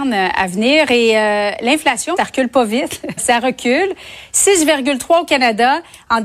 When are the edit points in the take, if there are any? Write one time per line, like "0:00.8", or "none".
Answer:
0:02.2
0:03.2